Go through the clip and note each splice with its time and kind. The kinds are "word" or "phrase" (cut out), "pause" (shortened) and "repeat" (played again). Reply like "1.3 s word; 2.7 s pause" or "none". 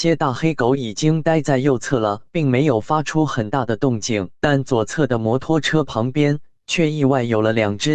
2.3 s pause; 4.3 s pause